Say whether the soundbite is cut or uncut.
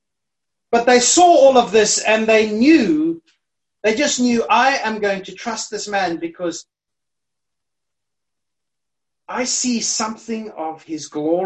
uncut